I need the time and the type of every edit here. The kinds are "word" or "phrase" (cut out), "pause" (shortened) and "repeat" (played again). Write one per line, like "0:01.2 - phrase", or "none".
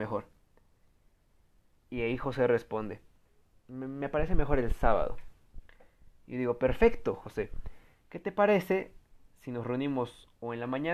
none

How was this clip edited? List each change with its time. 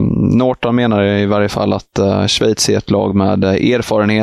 none

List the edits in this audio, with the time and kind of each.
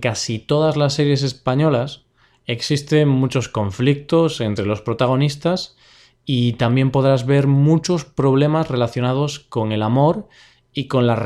none

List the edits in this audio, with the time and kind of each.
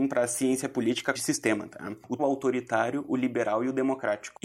0:01.2 - phrase
0:02.2 - word

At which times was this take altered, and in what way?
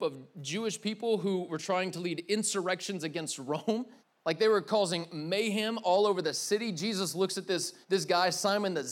0:04.0 - pause
0:07.8 - pause

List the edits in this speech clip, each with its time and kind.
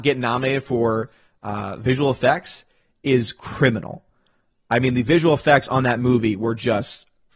none

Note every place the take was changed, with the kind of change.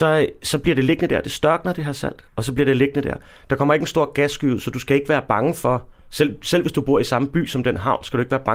none

